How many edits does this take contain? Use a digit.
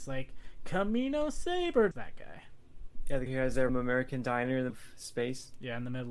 4